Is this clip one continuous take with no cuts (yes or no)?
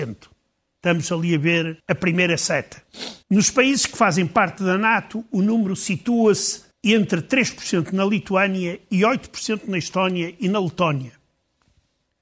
no